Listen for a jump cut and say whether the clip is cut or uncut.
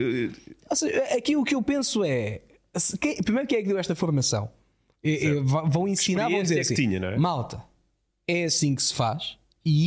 uncut